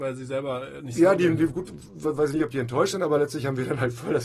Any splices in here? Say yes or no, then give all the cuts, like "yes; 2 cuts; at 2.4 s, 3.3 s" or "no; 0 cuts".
no; 0 cuts